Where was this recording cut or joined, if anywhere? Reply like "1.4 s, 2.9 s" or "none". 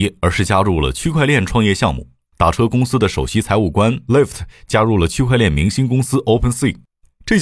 none